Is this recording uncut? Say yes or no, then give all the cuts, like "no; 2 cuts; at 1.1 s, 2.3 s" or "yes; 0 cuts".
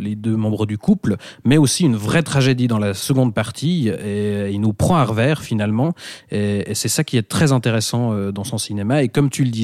yes; 0 cuts